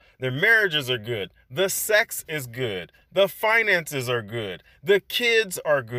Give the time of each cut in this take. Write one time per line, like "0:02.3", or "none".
none